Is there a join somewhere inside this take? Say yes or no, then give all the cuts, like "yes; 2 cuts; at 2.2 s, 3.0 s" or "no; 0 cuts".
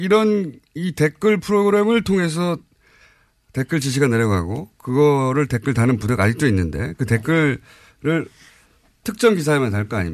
no; 0 cuts